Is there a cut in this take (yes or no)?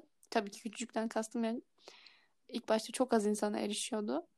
no